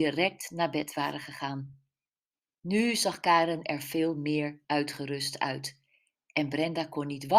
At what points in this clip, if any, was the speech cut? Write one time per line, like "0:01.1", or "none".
none